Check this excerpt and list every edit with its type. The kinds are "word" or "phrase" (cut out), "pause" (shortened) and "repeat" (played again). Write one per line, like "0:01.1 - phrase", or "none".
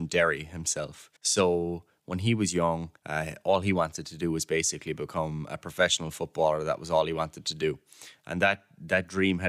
0:01.2 - pause
0:03.0 - pause